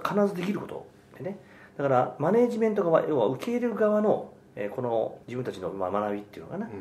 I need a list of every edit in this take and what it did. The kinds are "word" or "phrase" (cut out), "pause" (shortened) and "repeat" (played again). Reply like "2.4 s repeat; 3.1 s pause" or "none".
5.2 s pause

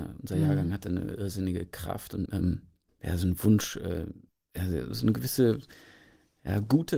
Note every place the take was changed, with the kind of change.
none

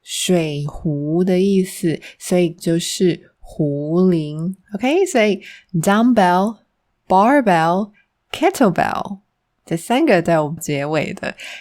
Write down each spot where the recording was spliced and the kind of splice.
2.6 s word; 4.6 s pause; 9.6 s word; 10.6 s word

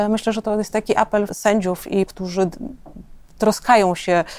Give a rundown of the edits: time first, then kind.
1.3 s word; 2.1 s word

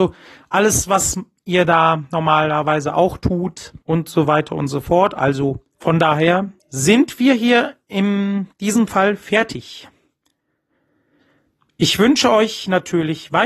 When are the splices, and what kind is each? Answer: 3.8 s pause; 5.7 s pause; 6.6 s pause

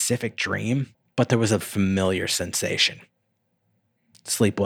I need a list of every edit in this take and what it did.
0.9 s pause; 1.6 s word

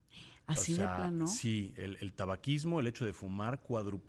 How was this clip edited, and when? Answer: none

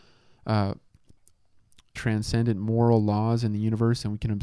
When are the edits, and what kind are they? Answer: 2.0 s phrase

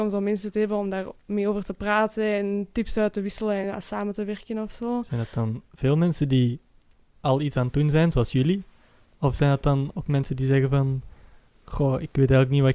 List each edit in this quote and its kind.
none

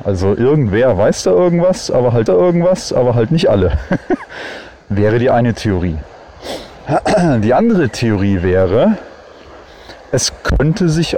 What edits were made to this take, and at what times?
2.3 s repeat

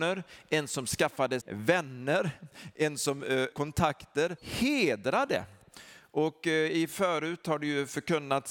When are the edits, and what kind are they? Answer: 1.4 s word; 3.5 s word; 4.4 s phrase

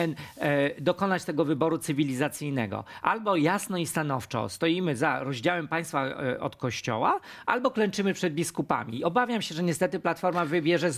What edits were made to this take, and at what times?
none

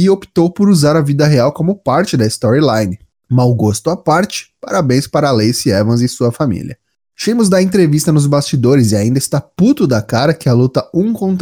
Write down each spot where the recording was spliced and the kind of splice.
none

